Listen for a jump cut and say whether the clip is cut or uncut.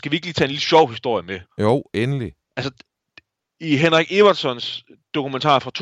cut